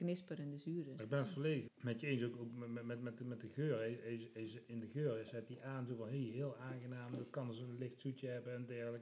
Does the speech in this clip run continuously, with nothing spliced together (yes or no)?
no